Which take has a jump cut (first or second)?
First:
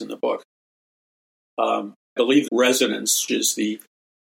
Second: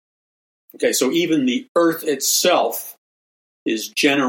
first